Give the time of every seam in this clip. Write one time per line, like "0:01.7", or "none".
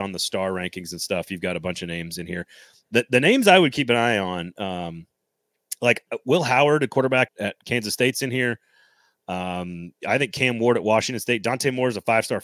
0:07.3
0:10.0